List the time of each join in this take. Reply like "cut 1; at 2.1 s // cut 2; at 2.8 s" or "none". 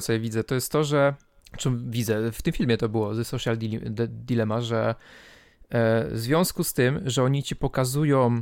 cut 1; at 1.4 s